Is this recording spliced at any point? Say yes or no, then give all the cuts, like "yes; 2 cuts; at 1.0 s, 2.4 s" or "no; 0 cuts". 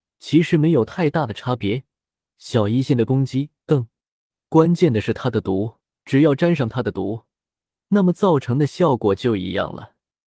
yes; 2 cuts; at 3.6 s, 6.0 s